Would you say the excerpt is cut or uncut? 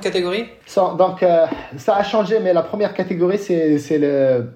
uncut